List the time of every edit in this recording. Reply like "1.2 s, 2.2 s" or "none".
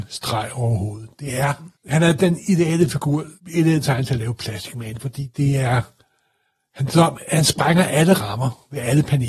1.8 s, 3.4 s